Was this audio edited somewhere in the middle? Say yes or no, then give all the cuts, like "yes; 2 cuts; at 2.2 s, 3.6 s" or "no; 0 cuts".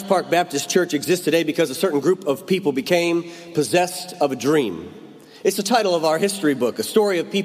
no; 0 cuts